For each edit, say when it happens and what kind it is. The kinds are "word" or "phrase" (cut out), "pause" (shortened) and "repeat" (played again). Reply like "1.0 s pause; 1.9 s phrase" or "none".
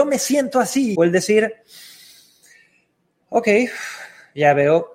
1.0 s phrase